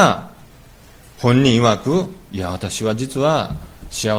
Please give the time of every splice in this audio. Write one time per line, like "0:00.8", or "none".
0:02.2